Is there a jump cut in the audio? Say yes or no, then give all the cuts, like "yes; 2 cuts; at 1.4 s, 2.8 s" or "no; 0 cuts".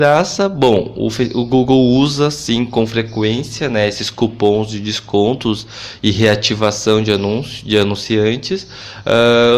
no; 0 cuts